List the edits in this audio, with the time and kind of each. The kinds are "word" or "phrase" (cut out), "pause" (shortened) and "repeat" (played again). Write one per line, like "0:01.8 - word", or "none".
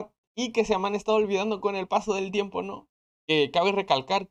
none